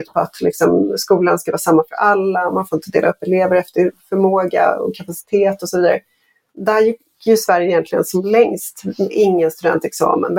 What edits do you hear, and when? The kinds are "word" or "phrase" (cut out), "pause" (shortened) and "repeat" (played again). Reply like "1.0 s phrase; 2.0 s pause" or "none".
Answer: none